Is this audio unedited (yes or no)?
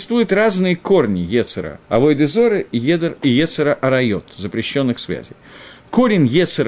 no